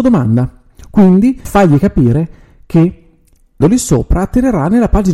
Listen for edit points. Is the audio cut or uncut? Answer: cut